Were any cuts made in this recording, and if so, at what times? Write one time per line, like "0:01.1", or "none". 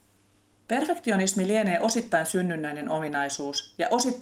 none